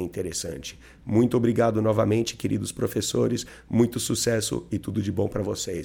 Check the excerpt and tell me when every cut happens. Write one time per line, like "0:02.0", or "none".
none